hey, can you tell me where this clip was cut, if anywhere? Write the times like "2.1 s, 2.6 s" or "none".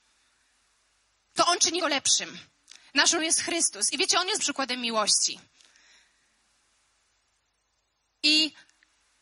1.8 s, 3.2 s, 4.4 s